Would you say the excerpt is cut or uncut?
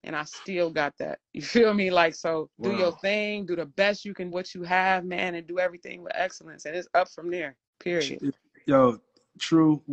cut